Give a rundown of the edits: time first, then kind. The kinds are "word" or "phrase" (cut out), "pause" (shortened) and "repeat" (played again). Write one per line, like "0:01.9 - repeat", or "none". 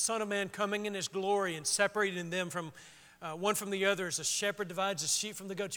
none